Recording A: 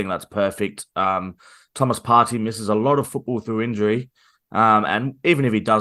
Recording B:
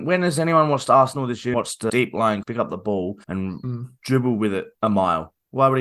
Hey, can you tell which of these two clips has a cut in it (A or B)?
B